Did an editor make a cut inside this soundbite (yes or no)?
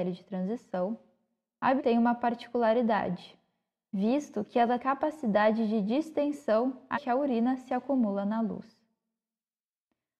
yes